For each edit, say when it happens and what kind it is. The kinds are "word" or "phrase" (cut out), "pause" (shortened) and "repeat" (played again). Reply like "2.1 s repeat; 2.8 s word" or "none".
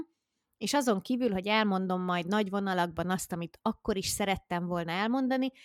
none